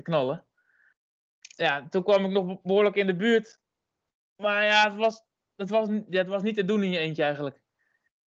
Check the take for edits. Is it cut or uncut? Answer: uncut